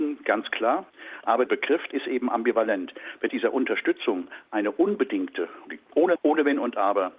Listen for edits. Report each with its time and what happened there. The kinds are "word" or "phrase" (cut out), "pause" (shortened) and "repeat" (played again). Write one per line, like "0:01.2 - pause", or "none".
0:01.5 - word
0:01.9 - word
0:03.3 - word
0:05.7 - word
0:06.2 - word